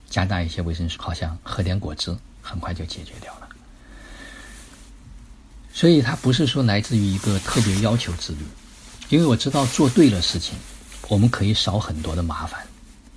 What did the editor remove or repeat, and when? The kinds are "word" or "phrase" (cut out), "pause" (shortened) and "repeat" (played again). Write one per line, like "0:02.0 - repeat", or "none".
0:01.0 - word